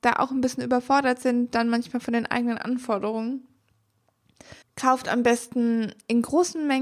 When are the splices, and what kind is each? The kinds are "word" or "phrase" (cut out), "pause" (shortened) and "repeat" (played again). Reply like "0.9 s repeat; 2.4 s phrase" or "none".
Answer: 4.6 s pause